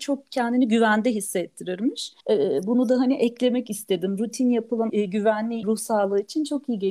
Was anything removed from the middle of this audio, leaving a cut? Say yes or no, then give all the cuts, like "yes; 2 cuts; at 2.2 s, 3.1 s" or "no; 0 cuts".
yes; 3 cuts; at 2.2 s, 4.9 s, 5.6 s